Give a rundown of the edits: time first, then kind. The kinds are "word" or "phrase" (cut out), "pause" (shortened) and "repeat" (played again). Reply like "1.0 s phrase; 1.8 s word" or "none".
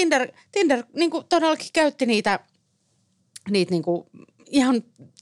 none